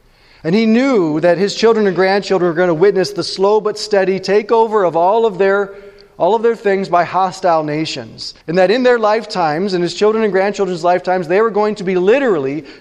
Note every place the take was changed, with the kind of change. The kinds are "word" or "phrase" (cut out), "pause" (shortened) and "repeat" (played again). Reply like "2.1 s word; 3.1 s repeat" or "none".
8.4 s pause

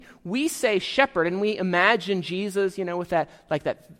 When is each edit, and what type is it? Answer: none

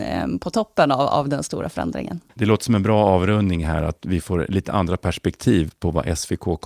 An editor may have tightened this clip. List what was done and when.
2.3 s pause

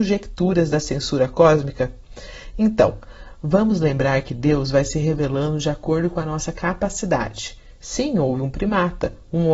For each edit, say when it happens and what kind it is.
none

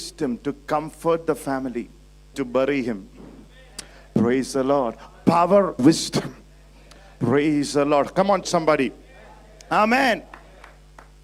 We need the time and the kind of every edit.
2.3 s word; 5.8 s word; 8.4 s word

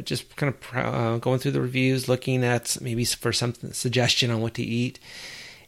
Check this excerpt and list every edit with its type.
none

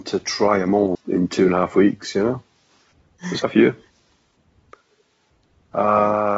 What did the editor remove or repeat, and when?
0.9 s word; 3.4 s word

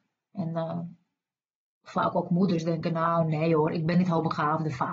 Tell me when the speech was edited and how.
none

